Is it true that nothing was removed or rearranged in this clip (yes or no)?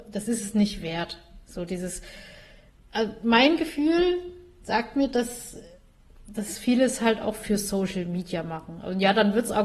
yes